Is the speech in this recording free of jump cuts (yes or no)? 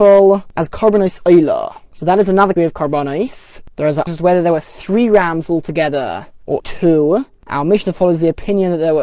no